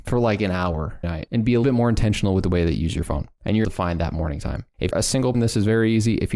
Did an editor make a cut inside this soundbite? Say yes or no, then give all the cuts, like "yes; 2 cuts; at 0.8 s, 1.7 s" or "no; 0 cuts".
yes; 5 cuts; at 1.0 s, 1.6 s, 3.6 s, 4.9 s, 5.3 s